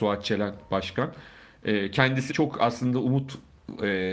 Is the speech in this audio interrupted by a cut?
yes; 1 cut; at 2.3 s

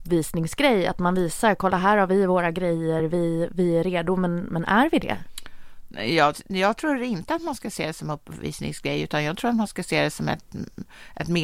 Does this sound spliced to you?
no; 0 cuts

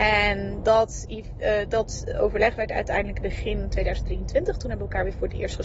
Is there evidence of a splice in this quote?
yes; 1 cut; at 3.2 s

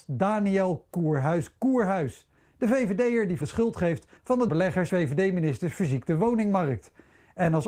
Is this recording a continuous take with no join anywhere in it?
no; 6 cuts; at 0.9 s, 2.4 s, 3.4 s, 4.2 s, 4.5 s, 4.9 s

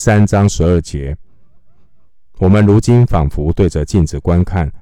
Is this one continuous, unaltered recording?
yes; 0 cuts

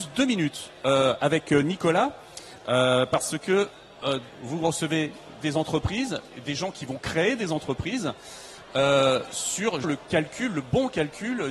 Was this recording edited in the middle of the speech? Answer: yes; 3 cuts; at 4.3 s, 5.4 s, 9.8 s

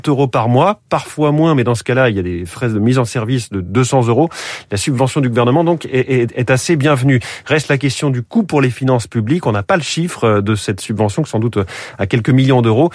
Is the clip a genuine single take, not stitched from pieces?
yes; 0 cuts

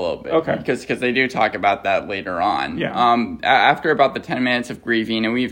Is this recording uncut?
yes; 0 cuts

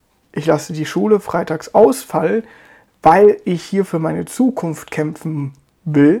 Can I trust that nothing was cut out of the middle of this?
yes; 0 cuts

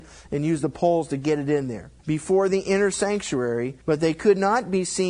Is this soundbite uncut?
no; 2 cuts; at 2.0 s, 3.8 s

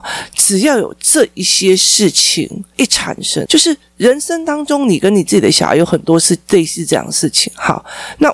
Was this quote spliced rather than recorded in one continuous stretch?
yes; 1 cut; at 3.5 s

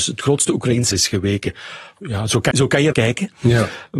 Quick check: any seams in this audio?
yes; 3 cuts; at 0.9 s, 2.5 s, 2.9 s

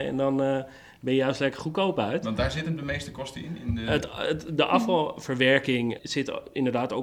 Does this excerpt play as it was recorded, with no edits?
no; 1 cut; at 6.0 s

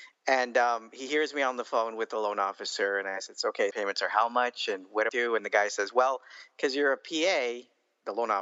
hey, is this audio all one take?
no; 2 cuts; at 3.7 s, 5.1 s

